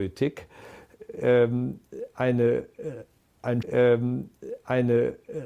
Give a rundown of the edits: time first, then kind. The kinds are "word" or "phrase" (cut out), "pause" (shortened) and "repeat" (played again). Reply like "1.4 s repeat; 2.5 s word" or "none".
3.6 s repeat